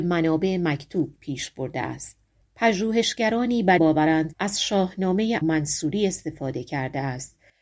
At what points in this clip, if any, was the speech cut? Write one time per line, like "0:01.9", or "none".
0:02.4
0:03.8
0:04.3
0:05.4